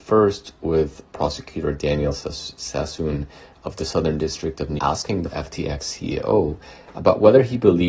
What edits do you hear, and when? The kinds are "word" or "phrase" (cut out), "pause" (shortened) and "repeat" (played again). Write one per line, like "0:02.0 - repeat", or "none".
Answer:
0:04.8 - word
0:05.3 - word